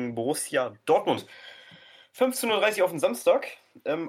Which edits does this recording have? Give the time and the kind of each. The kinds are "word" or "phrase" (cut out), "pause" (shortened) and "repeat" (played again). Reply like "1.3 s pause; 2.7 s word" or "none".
none